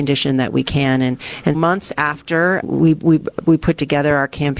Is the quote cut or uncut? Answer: cut